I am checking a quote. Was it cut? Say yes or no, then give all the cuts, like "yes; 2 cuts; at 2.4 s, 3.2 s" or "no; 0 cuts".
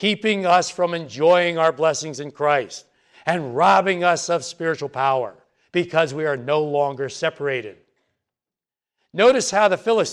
no; 0 cuts